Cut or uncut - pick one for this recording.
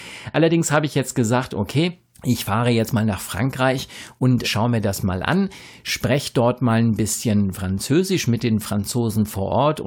cut